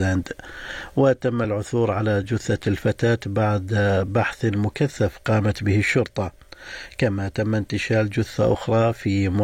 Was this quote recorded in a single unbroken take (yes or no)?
yes